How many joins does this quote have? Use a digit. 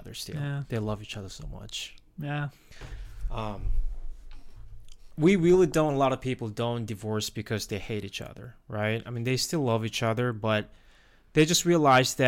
0